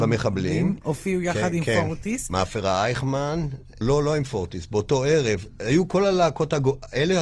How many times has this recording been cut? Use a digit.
1